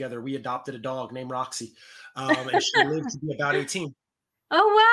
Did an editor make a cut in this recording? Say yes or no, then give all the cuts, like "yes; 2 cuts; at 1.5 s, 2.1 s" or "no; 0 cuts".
no; 0 cuts